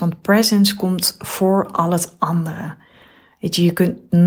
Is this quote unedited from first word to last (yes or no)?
yes